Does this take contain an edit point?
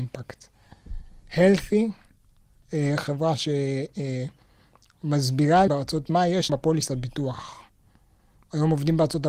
yes; 3 cuts; at 5.7 s, 6.0 s, 6.5 s

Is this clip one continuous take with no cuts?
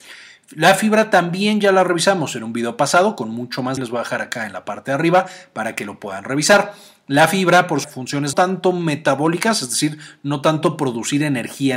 no; 3 cuts; at 3.8 s, 7.8 s, 8.3 s

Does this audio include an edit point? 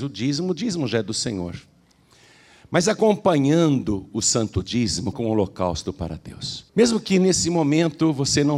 yes; 2 cuts; at 5.1 s, 6.7 s

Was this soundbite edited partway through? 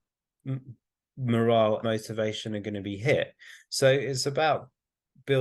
yes; 1 cut; at 1.8 s

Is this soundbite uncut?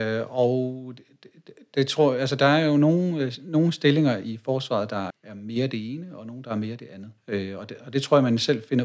no; 2 cuts; at 5.1 s, 7.2 s

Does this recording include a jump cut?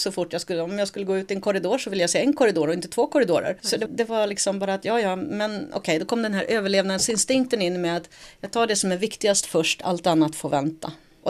no; 0 cuts

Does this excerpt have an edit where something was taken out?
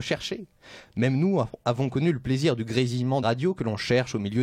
yes; 2 cuts; at 1.6 s, 3.2 s

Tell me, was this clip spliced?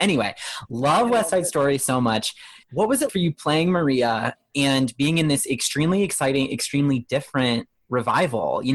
yes; 2 cuts; at 2.6 s, 3.1 s

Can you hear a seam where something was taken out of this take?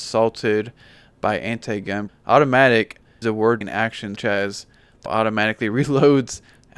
yes; 5 cuts; at 2.1 s, 3.2 s, 3.6 s, 4.2 s, 5.1 s

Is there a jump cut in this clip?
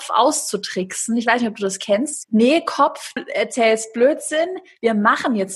yes; 2 cuts; at 2.2 s, 3.2 s

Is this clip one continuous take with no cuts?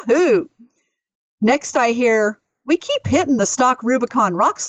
yes; 0 cuts

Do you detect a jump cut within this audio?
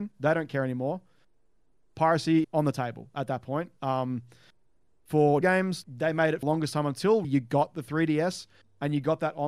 yes; 5 cuts; at 2.4 s, 5.4 s, 5.8 s, 6.4 s, 7.2 s

